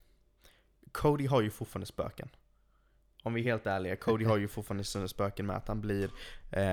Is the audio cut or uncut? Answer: uncut